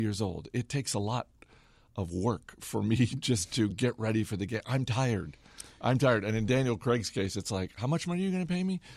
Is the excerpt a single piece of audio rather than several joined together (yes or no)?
yes